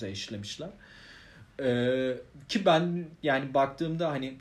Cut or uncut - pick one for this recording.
uncut